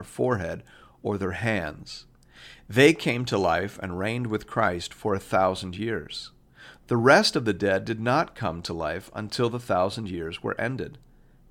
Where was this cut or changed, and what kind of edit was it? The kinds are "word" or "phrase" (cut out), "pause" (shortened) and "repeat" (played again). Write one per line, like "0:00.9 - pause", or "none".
none

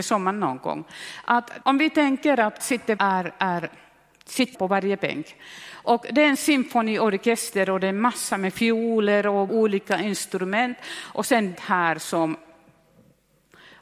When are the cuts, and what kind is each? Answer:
0:01.6 - pause
0:02.6 - word
0:03.0 - phrase
0:04.5 - word
0:09.5 - word
0:11.5 - word

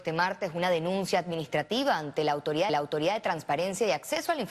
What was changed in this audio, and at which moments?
0:02.7 - repeat

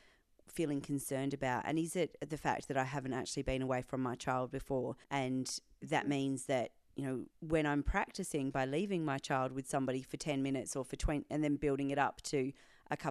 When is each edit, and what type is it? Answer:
0:05.0 - pause
0:07.3 - pause

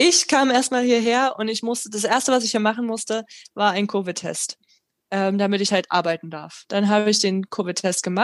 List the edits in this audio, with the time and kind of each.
none

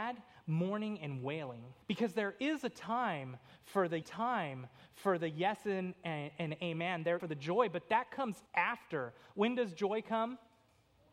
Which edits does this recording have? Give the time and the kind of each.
0:01.8 - pause
0:04.0 - repeat
0:07.2 - phrase
0:08.5 - pause

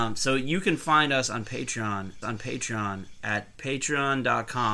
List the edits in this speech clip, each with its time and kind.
0:02.2 - repeat

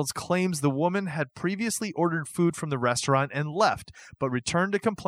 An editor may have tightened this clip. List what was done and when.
none

